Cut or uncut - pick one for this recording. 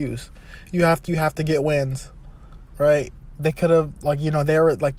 cut